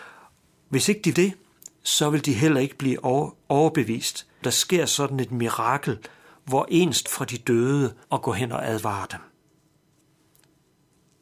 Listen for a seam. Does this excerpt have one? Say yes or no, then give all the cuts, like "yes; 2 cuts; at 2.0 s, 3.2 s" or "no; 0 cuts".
yes; 4 cuts; at 1.1 s, 4.4 s, 7.0 s, 8.0 s